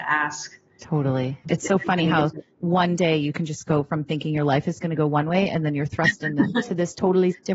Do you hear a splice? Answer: yes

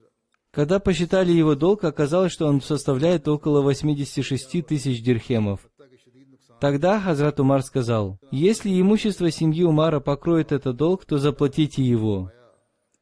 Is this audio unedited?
no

